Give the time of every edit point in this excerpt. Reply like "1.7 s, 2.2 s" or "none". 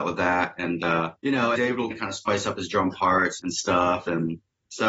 1.2 s, 1.6 s, 1.9 s, 3.4 s